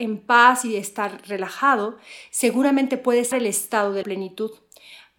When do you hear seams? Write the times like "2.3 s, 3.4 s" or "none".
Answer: 3.3 s, 4.0 s